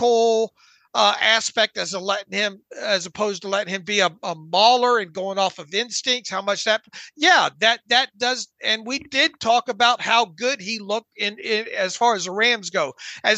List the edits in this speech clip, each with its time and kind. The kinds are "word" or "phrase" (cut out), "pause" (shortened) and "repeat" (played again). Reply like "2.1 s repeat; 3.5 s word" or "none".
3.8 s word; 4.2 s word